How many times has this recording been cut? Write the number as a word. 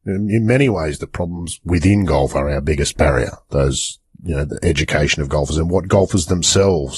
zero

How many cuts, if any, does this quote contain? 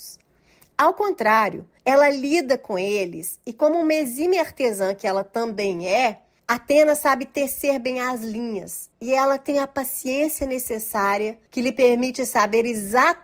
four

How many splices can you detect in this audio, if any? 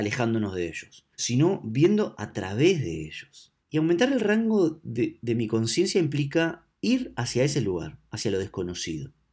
three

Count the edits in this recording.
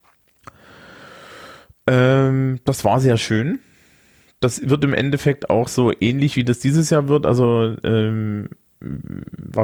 zero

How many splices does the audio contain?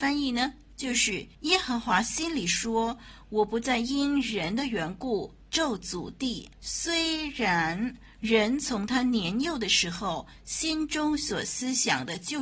two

